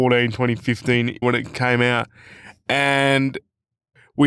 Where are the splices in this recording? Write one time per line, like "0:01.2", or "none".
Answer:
0:01.2